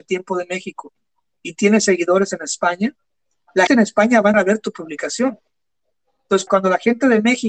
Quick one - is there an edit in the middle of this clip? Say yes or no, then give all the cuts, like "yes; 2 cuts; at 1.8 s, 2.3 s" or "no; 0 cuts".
yes; 3 cuts; at 3.7 s, 4.3 s, 6.5 s